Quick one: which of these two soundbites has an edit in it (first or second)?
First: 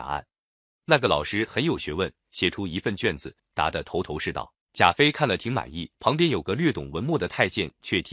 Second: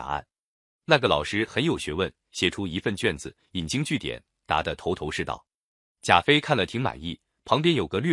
first